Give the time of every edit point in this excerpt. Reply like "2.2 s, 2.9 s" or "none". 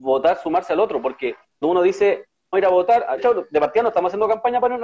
1.6 s, 2.5 s, 3.2 s

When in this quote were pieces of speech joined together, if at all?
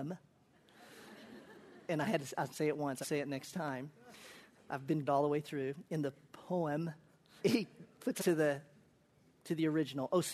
1.9 s, 3.0 s, 5.1 s, 7.4 s, 8.2 s

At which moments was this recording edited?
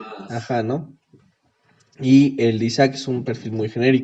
none

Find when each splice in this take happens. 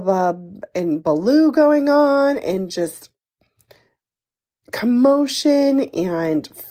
none

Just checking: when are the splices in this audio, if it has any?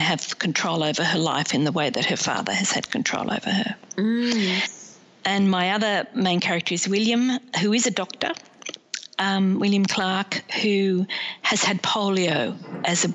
none

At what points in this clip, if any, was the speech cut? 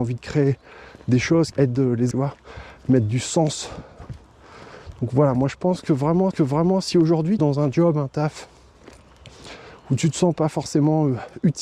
1.5 s, 2.1 s, 6.3 s, 7.4 s

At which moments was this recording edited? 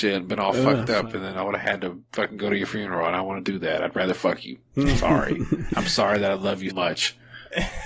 2.1 s, 4.7 s, 6.7 s

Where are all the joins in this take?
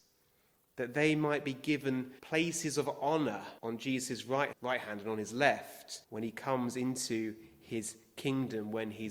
2.2 s, 3.6 s, 4.5 s, 6.0 s

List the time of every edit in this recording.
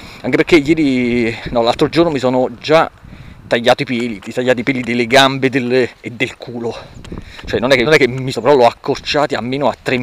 4.2 s, 6.0 s, 7.8 s, 8.3 s

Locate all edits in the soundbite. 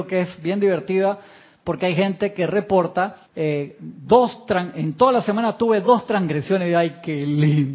3.3 s

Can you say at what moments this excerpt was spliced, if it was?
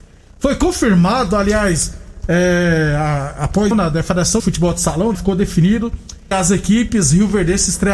3.7 s, 4.4 s, 5.1 s, 6.3 s

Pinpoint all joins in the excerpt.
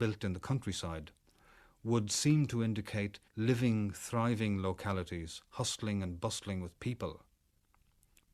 3.3 s

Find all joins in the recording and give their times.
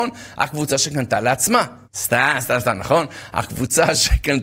1.8 s

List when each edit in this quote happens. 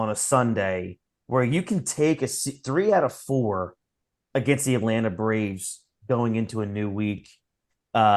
none

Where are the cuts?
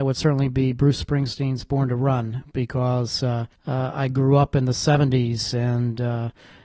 3.5 s

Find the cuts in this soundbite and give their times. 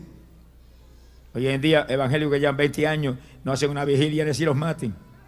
none

